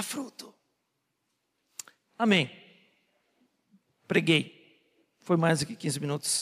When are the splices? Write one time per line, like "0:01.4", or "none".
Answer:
none